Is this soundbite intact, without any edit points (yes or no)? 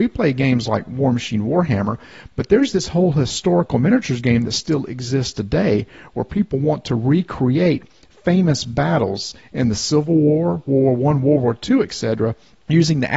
yes